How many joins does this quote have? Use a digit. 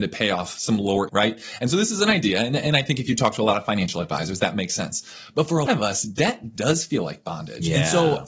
2